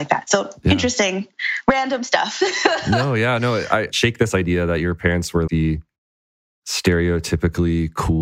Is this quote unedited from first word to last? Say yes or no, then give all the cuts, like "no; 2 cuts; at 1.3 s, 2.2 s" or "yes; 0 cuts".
no; 2 cuts; at 3.9 s, 5.5 s